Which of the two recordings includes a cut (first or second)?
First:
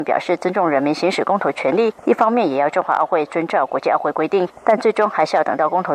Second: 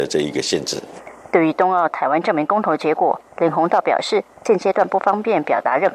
first